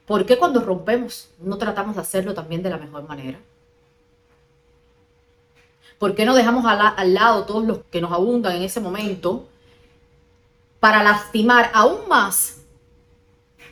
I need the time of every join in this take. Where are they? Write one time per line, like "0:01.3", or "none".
0:07.8

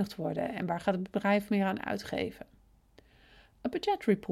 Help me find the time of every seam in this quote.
none

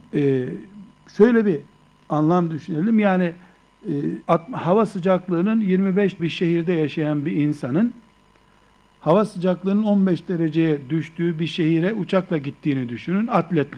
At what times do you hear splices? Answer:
0:04.2
0:06.2

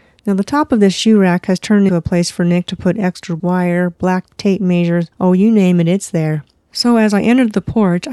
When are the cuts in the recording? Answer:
0:01.9
0:03.4
0:04.3
0:05.1
0:06.6

